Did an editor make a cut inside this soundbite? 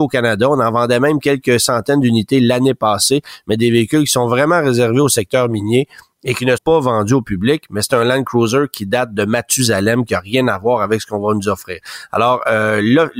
yes; 1 cut; at 6.6 s

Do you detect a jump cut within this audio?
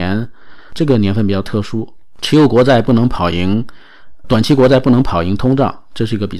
yes; 1 cut; at 4.2 s

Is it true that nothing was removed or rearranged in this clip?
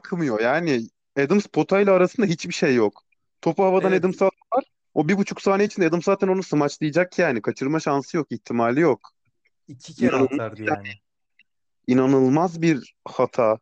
yes; 0 cuts

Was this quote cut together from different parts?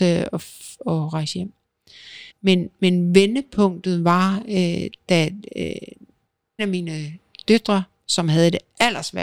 yes; 2 cuts; at 2.3 s, 6.6 s

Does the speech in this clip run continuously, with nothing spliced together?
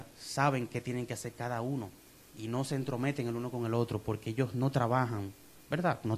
yes; 0 cuts

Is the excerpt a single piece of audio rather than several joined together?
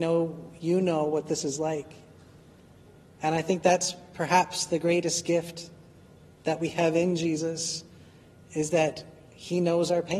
yes; 0 cuts

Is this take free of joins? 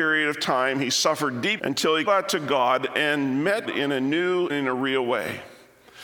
no; 4 cuts; at 1.6 s, 2.1 s, 3.6 s, 4.5 s

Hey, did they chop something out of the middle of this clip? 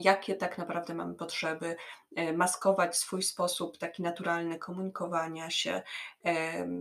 no; 0 cuts

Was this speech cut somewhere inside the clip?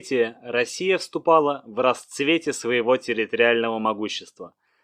no; 0 cuts

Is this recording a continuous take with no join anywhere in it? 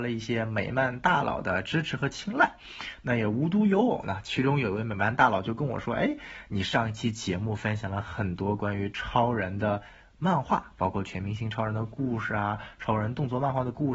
yes; 0 cuts

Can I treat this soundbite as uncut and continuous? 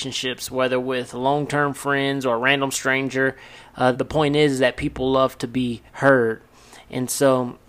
no; 2 cuts; at 3.9 s, 5.9 s

